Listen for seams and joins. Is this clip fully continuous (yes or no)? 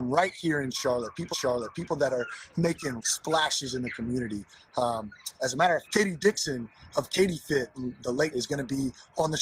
no